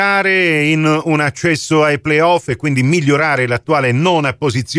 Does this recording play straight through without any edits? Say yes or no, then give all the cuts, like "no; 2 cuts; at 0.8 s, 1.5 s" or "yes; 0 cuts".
yes; 0 cuts